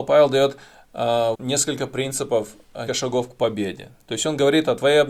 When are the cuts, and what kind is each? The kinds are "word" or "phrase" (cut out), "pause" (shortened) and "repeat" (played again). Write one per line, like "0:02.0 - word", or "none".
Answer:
0:01.3 - word
0:02.9 - word

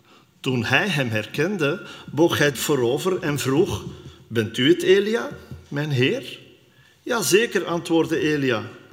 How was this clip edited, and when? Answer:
0:02.5 - word

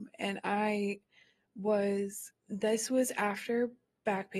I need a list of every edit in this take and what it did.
0:02.4 - pause

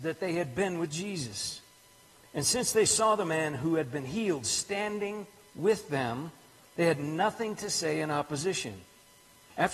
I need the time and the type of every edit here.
none

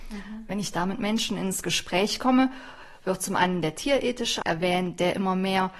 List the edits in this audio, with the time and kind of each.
0:04.4 - word

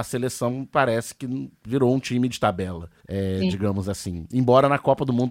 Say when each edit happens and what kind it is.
0:02.3 - word

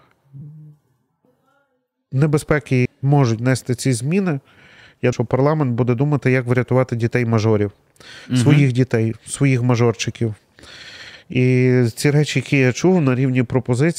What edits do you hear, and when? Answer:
0:02.9 - word
0:05.1 - word

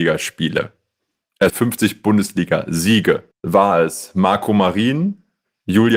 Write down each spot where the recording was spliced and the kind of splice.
0:01.5 - word
0:03.3 - pause

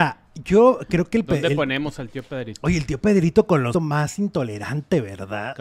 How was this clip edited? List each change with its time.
0:03.7 - phrase

